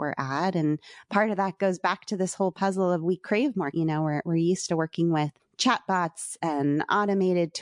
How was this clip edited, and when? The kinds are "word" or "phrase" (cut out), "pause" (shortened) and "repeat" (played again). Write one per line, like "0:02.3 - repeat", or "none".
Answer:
0:03.7 - word
0:05.4 - pause